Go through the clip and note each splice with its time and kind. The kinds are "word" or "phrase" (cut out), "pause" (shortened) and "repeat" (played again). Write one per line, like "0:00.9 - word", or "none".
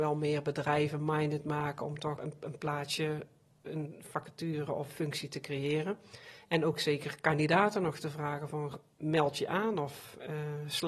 0:02.2 - word
0:04.9 - phrase